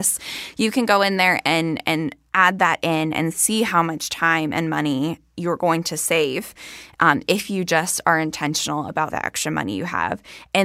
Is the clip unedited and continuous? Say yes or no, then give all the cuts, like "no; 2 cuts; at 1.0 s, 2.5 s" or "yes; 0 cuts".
no; 1 cut; at 9.1 s